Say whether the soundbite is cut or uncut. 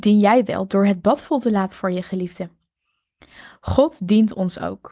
cut